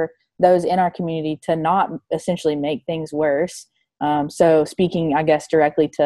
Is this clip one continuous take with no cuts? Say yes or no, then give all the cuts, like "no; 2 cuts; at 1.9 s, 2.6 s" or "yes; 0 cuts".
yes; 0 cuts